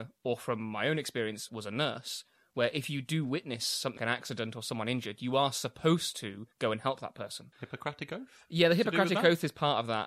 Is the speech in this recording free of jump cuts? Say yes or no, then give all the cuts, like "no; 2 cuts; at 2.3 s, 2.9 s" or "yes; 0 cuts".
no; 4 cuts; at 1.5 s, 4.0 s, 6.5 s, 7.5 s